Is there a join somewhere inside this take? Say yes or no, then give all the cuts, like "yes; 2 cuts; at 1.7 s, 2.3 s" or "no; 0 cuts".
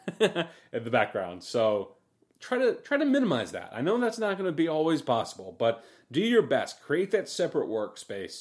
no; 0 cuts